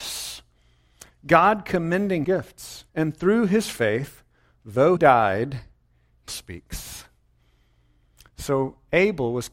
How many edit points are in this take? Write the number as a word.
four